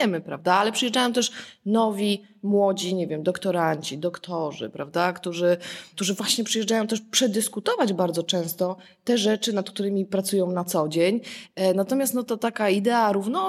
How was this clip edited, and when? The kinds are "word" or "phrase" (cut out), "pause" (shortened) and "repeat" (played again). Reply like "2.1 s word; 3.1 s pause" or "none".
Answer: none